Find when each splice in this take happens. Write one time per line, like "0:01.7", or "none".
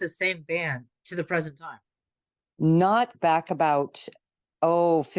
0:03.1